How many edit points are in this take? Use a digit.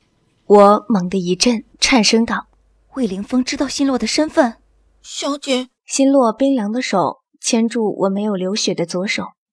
3